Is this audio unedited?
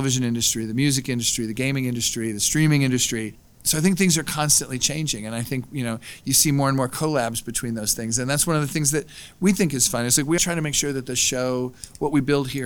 no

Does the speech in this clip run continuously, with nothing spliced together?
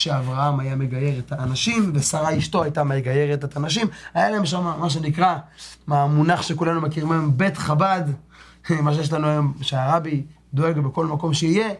yes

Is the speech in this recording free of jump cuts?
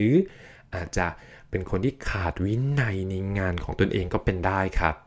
yes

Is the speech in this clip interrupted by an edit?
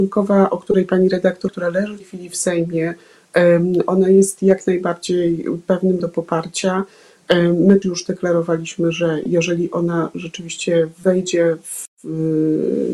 yes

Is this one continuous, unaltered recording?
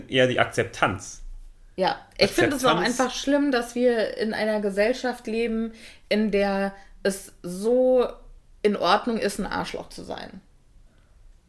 yes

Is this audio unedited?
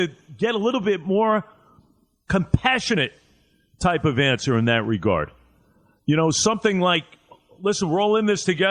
yes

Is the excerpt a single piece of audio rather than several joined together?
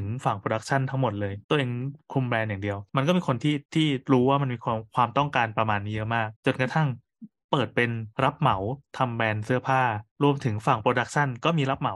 no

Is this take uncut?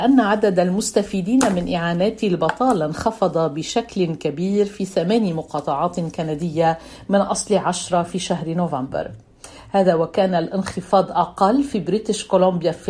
yes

